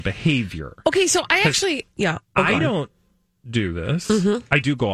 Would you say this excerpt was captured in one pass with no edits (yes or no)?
yes